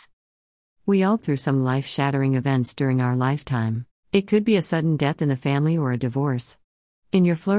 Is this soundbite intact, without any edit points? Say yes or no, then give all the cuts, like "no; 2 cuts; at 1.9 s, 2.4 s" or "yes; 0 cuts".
no; 2 cuts; at 1.2 s, 3.9 s